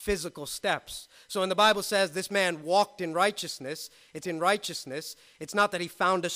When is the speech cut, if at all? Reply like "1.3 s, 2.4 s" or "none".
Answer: 4.2 s